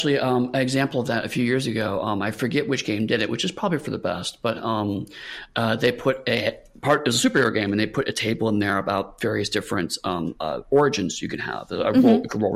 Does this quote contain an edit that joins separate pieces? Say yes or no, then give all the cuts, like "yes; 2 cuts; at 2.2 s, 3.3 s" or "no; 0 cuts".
no; 0 cuts